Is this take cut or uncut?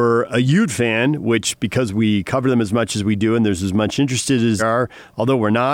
cut